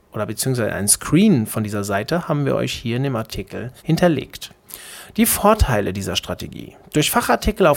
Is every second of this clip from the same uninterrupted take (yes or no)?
no